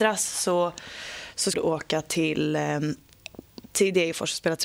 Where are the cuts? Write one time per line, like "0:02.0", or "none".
0:01.5